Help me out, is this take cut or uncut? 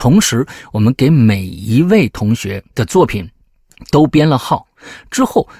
cut